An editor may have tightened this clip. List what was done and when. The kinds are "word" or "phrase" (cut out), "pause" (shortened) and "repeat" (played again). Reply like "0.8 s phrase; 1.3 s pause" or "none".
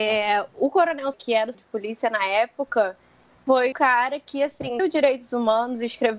1.1 s word; 1.5 s word; 3.7 s word; 4.8 s word